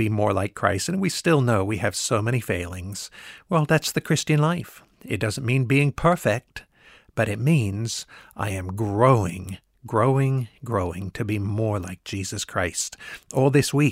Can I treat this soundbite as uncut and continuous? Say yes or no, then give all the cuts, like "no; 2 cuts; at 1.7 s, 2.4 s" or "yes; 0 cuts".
no; 1 cut; at 4.9 s